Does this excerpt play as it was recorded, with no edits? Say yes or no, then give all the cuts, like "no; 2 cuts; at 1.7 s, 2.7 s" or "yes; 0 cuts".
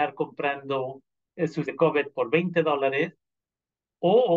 no; 1 cut; at 1.7 s